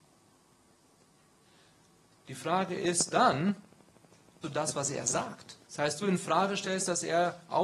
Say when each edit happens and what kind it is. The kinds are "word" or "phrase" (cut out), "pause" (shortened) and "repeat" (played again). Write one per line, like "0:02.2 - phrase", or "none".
0:04.4 - word
0:05.6 - pause
0:06.0 - word